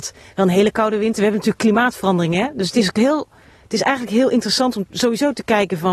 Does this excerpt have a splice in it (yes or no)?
no